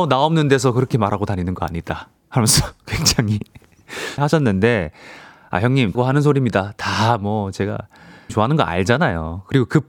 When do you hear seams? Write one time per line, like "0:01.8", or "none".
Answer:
0:02.2
0:04.2
0:05.9
0:08.3